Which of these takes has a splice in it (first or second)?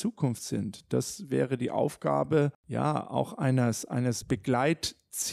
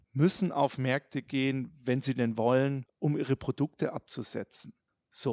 first